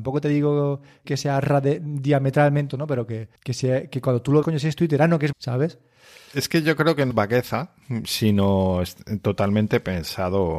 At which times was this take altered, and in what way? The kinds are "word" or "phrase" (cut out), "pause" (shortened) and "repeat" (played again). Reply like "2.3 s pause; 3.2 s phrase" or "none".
1.0 s word; 2.7 s word; 3.4 s pause; 4.4 s phrase; 5.3 s word; 7.1 s word